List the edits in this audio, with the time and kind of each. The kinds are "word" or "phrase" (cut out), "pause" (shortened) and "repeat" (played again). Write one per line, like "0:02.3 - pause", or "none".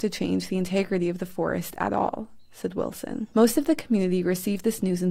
0:03.3 - pause